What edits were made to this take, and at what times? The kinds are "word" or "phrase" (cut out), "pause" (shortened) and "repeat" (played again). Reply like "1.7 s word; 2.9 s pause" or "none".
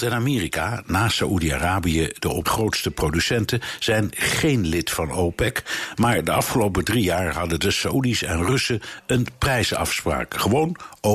2.4 s phrase